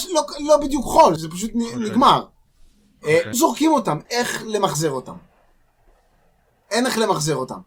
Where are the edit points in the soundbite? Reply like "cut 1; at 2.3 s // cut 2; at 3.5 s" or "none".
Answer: cut 1; at 1.2 s // cut 2; at 3.3 s // cut 3; at 4.1 s